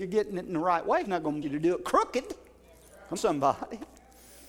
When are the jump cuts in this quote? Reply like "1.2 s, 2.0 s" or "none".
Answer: 1.0 s, 1.4 s, 3.2 s